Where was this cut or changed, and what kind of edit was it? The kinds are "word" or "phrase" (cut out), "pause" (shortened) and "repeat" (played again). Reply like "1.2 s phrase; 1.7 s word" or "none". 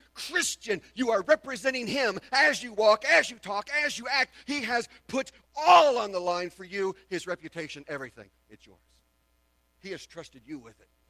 none